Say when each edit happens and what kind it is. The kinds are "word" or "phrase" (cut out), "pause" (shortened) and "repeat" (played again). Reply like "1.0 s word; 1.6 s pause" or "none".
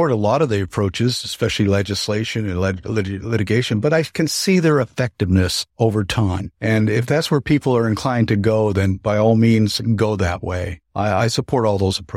5.7 s pause; 6.5 s pause; 10.9 s pause